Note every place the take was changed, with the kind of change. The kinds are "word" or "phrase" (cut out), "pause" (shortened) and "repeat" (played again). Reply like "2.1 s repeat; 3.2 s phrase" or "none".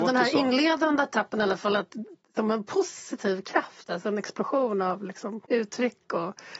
5.5 s pause